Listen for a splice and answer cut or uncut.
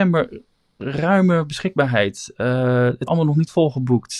cut